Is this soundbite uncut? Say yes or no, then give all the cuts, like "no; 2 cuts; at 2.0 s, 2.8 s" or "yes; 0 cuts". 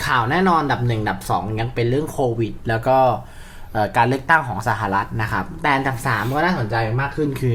yes; 0 cuts